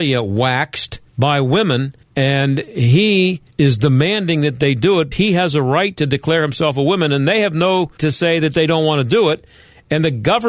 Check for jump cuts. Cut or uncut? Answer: cut